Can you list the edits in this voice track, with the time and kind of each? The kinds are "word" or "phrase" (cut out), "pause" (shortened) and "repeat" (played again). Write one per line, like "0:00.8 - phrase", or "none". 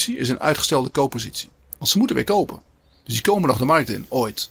none

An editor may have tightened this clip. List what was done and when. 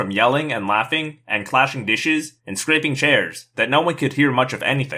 0:02.4 - pause

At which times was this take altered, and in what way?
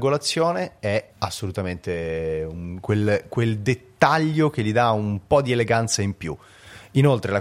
0:01.1 - pause

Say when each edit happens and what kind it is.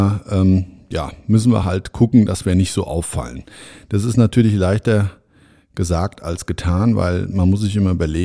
none

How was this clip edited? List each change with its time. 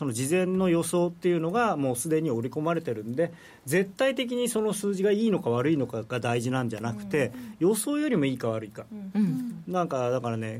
none

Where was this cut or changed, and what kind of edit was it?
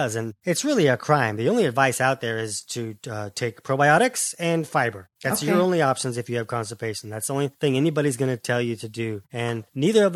none

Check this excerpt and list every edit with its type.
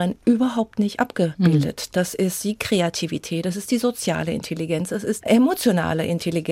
0:05.2 - word

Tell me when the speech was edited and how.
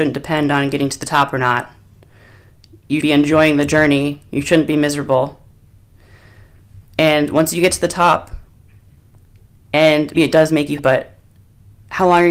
0:03.0 - word
0:10.1 - word
0:10.8 - word

